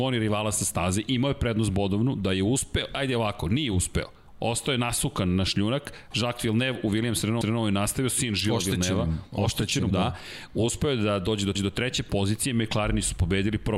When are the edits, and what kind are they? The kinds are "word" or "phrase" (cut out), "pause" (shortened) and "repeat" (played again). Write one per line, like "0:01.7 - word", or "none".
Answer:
0:07.4 - repeat
0:09.9 - word
0:11.5 - repeat